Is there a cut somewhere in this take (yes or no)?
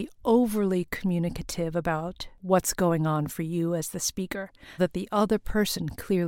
yes